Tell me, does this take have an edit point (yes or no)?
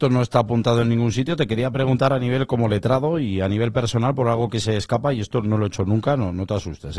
no